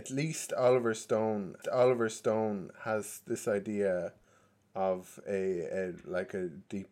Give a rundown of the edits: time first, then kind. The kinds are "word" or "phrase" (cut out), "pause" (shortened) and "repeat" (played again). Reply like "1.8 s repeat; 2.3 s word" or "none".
1.6 s repeat

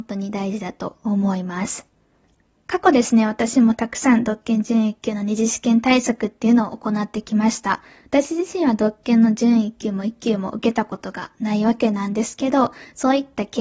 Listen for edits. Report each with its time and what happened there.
none

